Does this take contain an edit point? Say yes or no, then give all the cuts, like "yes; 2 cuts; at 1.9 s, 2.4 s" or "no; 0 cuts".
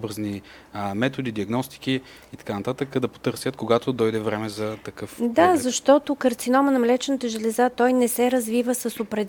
no; 0 cuts